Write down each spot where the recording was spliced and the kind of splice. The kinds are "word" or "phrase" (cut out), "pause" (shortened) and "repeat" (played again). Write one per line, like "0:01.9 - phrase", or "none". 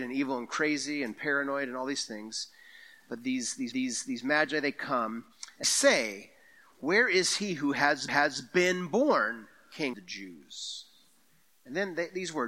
0:03.7 - repeat
0:05.6 - word
0:08.1 - repeat
0:09.9 - word